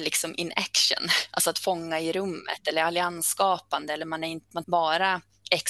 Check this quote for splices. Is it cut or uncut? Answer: cut